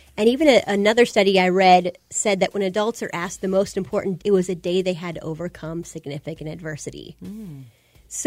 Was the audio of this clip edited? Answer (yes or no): yes